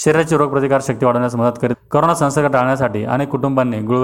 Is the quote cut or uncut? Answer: cut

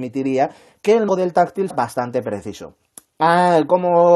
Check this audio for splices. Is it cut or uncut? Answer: cut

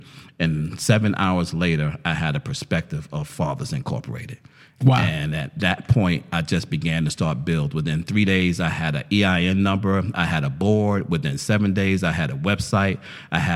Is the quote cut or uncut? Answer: uncut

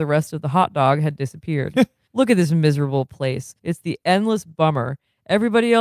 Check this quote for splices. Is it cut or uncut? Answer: cut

